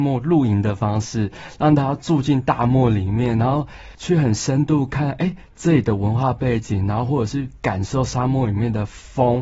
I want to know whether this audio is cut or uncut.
uncut